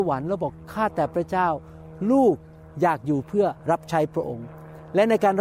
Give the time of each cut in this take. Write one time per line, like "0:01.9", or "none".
0:03.6